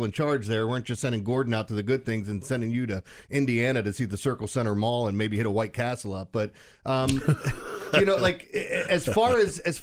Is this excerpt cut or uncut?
uncut